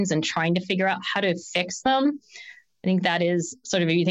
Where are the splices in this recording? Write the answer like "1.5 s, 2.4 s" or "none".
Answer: none

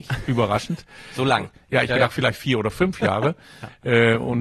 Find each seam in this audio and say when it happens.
1.9 s

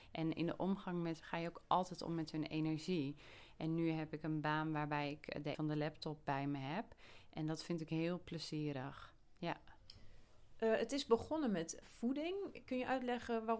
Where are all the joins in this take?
1.2 s, 5.5 s, 6.2 s, 11.8 s

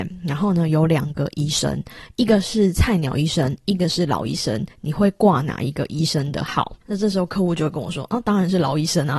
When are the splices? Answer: 4.7 s, 6.8 s

